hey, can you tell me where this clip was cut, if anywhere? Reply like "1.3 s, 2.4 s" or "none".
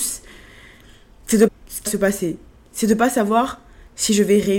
1.5 s, 1.9 s